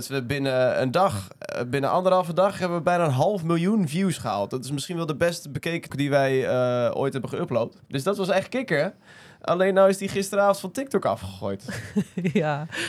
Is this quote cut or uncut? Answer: cut